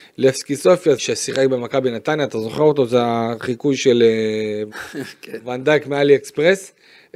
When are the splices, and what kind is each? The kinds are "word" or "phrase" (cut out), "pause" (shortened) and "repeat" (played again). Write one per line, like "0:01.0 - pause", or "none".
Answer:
0:01.0 - phrase
0:04.7 - word